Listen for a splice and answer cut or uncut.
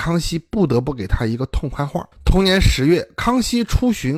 cut